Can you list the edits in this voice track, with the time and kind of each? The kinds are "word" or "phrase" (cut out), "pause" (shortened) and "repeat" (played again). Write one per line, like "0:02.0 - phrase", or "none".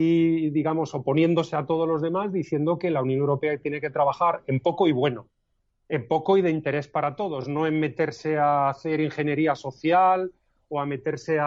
none